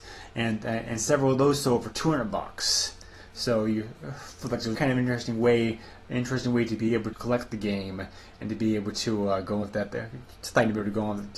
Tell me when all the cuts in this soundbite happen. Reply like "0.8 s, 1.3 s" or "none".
4.7 s, 7.1 s, 9.6 s